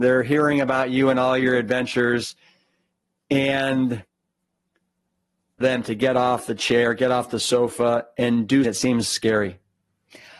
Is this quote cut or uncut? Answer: cut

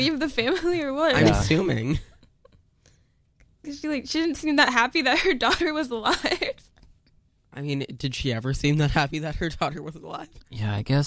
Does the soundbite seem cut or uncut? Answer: uncut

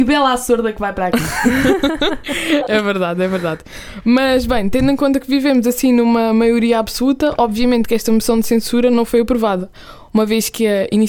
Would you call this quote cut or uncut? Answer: uncut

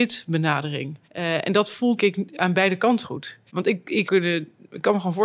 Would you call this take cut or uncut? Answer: cut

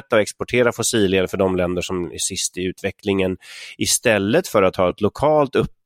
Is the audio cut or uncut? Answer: uncut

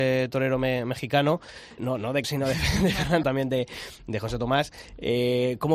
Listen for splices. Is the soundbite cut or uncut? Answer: cut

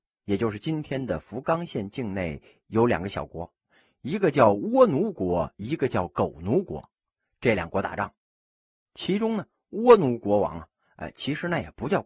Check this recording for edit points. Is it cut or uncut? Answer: uncut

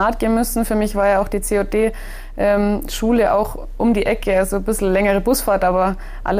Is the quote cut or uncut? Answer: uncut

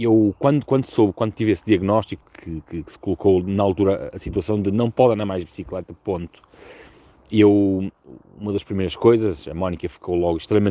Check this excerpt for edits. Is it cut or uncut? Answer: uncut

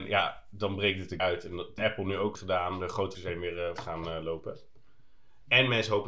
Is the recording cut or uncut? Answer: cut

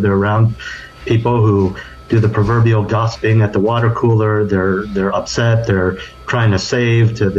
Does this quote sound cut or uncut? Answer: uncut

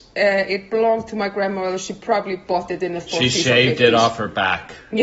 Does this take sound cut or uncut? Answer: uncut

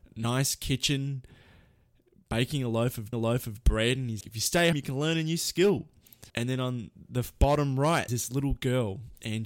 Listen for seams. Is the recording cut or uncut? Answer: cut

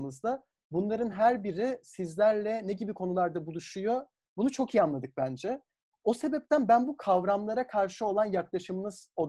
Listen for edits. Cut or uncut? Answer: uncut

